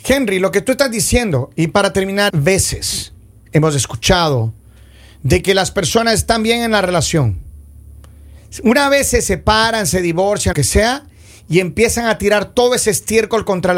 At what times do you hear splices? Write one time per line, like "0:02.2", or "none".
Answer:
0:02.3
0:10.5